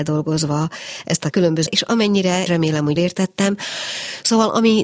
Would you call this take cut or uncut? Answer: cut